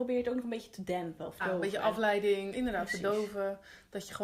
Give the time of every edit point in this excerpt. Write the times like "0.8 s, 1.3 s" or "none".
1.4 s, 2.5 s